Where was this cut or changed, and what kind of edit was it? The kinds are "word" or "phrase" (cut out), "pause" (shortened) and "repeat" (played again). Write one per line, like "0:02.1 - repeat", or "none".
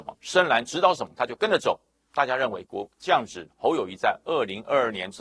none